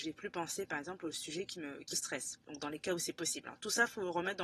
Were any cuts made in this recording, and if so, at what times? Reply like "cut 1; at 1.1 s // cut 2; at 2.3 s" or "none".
cut 1; at 1.9 s